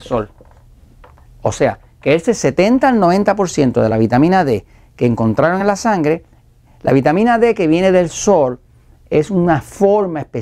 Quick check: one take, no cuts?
yes; 0 cuts

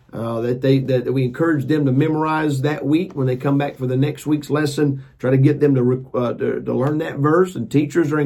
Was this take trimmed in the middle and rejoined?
no; 0 cuts

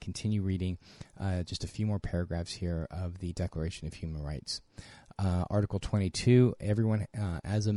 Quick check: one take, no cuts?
yes; 0 cuts

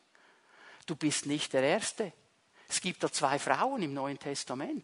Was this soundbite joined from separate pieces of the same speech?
no; 0 cuts

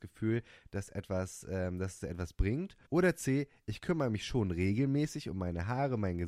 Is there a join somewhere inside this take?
yes; 1 cut; at 2.8 s

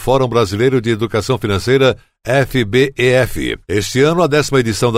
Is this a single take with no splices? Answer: yes; 0 cuts

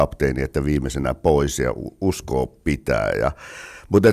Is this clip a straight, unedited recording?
yes; 0 cuts

